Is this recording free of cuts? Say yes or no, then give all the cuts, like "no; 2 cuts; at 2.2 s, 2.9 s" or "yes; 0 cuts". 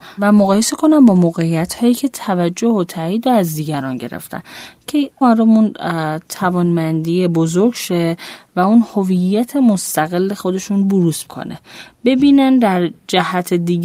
no; 2 cuts; at 5.2 s, 11.2 s